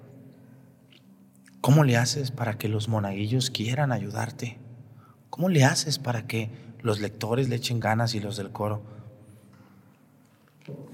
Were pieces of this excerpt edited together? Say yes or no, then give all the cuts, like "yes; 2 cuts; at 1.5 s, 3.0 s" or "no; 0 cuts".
no; 0 cuts